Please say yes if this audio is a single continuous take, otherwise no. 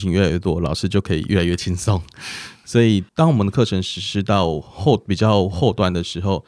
no